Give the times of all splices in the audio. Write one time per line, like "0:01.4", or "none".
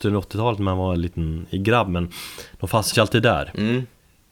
0:02.9